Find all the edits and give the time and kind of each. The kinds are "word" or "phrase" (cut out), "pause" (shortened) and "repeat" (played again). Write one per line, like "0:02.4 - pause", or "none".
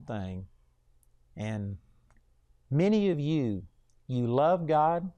none